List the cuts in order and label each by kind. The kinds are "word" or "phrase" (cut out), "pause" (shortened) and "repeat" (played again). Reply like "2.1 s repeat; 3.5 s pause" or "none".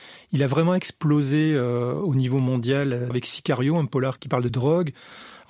3.1 s word; 4.5 s phrase